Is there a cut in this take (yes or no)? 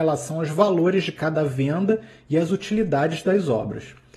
no